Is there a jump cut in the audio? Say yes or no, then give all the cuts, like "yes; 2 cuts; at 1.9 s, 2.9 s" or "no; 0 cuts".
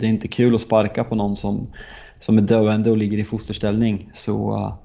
no; 0 cuts